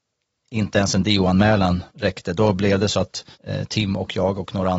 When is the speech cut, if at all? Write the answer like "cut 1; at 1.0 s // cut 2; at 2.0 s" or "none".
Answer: cut 1; at 1.9 s // cut 2; at 3.3 s